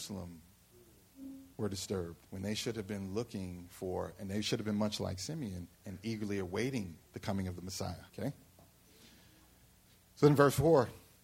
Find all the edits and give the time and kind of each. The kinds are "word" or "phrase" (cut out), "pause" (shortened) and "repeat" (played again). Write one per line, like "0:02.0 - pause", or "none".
0:01.5 - pause
0:02.3 - pause
0:05.7 - pause
0:07.1 - pause
0:08.1 - pause